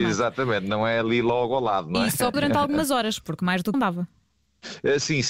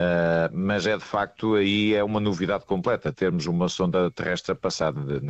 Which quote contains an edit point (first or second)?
first